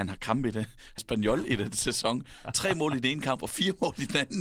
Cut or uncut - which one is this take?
cut